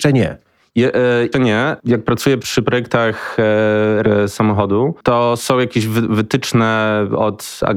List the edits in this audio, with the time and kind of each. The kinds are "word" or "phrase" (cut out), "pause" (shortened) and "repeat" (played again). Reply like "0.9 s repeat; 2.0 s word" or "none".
1.3 s word; 2.4 s word; 4.0 s word; 5.4 s word